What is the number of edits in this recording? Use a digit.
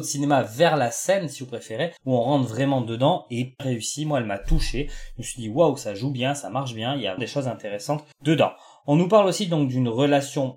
4